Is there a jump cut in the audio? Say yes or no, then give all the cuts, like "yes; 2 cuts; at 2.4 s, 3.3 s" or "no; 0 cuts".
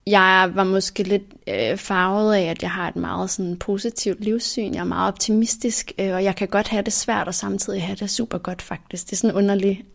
no; 0 cuts